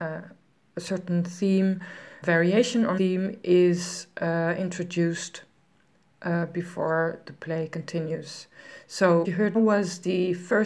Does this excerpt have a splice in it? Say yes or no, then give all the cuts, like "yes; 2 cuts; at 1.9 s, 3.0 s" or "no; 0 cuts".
yes; 5 cuts; at 2.2 s, 3.0 s, 7.2 s, 9.2 s, 9.5 s